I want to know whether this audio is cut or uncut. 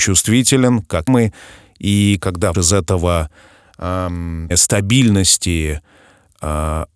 cut